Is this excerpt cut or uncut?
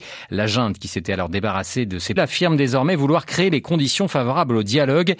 cut